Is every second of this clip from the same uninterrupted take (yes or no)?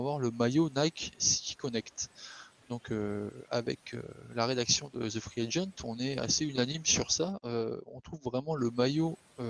yes